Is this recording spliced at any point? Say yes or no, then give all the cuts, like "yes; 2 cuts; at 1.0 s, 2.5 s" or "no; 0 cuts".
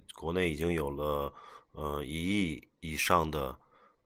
yes; 1 cut; at 2.7 s